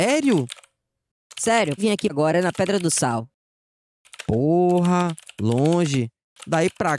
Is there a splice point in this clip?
yes; 2 cuts; at 1.8 s, 2.1 s

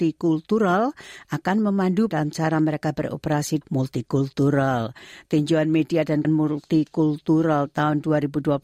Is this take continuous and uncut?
no; 3 cuts; at 2.1 s, 3.6 s, 6.2 s

